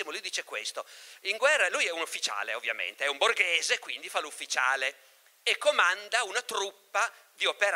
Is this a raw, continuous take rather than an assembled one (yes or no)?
yes